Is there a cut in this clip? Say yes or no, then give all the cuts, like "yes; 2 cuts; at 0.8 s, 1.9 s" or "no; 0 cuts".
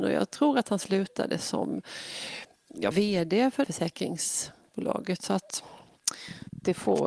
yes; 2 cuts; at 2.9 s, 3.6 s